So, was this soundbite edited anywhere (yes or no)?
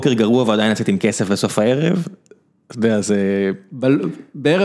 no